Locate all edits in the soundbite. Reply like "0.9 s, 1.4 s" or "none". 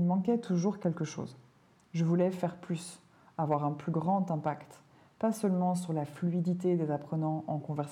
none